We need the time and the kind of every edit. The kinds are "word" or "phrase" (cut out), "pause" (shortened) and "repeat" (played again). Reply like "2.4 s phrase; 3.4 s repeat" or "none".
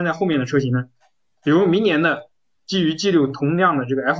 none